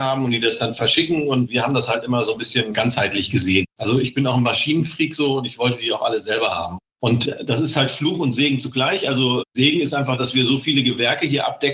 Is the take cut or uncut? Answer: uncut